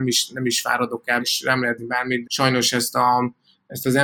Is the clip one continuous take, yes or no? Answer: no